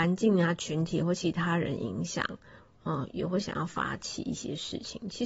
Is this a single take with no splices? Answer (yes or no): yes